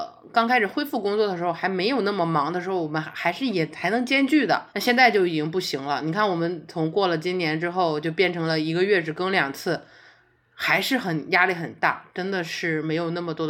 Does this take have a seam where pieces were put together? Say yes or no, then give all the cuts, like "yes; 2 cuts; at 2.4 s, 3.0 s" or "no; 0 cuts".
yes; 1 cut; at 4.7 s